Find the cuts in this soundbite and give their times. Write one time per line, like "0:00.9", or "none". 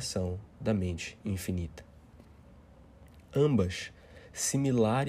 none